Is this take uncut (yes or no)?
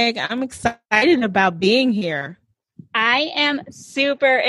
yes